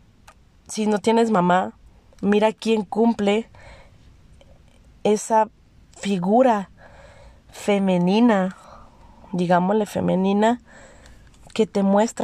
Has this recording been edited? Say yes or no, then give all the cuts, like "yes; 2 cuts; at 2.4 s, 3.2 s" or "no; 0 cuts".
no; 0 cuts